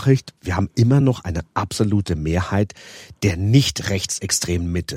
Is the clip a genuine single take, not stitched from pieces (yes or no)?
yes